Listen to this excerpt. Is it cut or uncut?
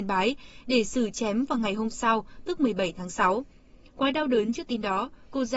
uncut